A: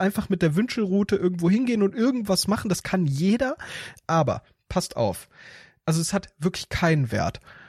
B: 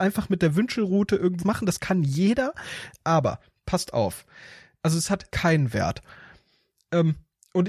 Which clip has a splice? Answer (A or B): B